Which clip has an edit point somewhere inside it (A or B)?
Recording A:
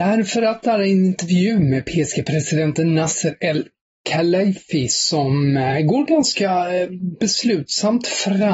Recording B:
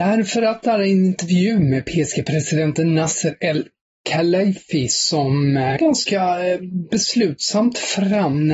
B